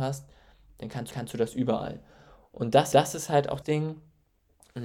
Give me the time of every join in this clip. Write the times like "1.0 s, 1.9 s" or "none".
1.1 s, 2.9 s, 3.6 s